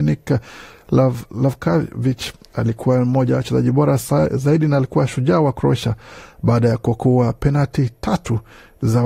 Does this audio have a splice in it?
no; 0 cuts

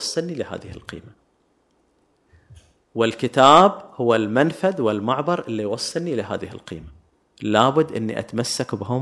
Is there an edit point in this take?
no; 0 cuts

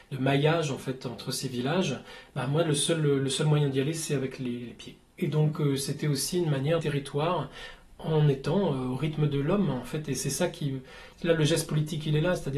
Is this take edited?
yes; 2 cuts; at 6.8 s, 11.1 s

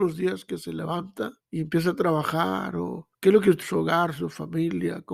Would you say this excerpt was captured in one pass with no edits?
no; 3 cuts; at 1.4 s, 3.1 s, 3.6 s

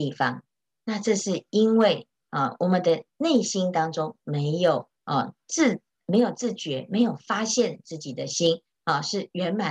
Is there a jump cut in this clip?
yes; 2 cuts; at 5.0 s, 8.7 s

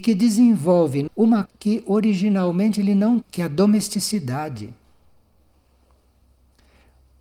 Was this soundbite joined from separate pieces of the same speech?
yes; 3 cuts; at 1.1 s, 1.5 s, 3.2 s

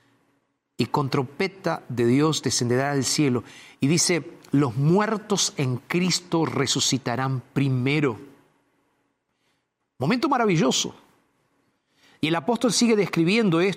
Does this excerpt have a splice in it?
no; 0 cuts

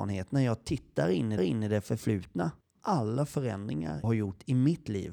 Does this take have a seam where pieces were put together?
yes; 3 cuts; at 1.4 s, 2.7 s, 4.0 s

